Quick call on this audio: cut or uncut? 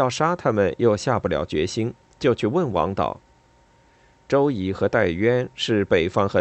uncut